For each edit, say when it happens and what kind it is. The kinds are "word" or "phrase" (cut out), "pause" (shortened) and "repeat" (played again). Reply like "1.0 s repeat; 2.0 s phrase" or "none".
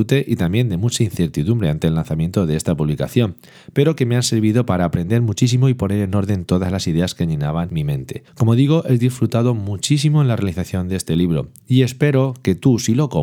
8.3 s pause